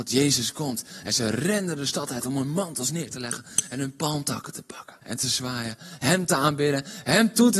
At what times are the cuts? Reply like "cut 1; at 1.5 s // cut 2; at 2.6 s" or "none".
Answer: cut 1; at 5.0 s